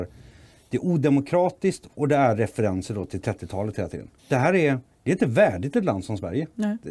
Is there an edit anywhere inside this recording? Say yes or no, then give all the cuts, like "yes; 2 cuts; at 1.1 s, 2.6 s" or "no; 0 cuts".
yes; 1 cut; at 4.2 s